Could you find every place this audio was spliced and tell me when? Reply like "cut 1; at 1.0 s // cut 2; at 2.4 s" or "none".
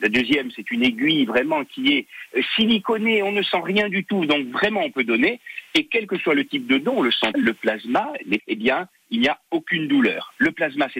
cut 1; at 7.3 s // cut 2; at 8.4 s